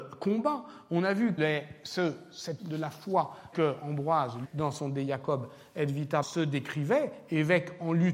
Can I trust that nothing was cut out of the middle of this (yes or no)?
no